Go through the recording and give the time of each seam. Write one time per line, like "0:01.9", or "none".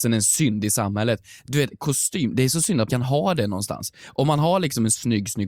0:02.9